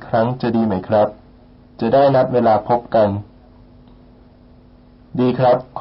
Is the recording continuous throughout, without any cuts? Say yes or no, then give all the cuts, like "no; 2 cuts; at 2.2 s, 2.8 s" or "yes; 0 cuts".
yes; 0 cuts